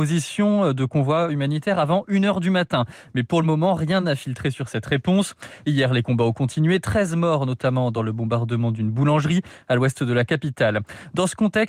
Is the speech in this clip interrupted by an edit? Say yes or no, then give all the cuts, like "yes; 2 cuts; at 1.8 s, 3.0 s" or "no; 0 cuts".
no; 0 cuts